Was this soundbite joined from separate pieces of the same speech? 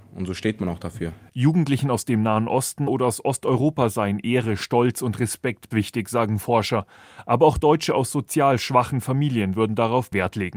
yes; 2 cuts; at 2.9 s, 5.7 s

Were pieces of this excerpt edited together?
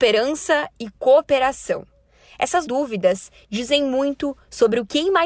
yes; 1 cut; at 2.7 s

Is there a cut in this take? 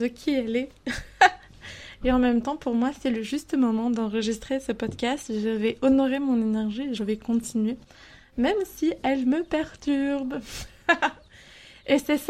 no; 0 cuts

